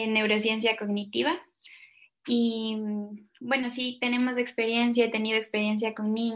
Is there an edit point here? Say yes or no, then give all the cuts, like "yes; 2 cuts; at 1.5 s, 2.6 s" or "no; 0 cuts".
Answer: no; 0 cuts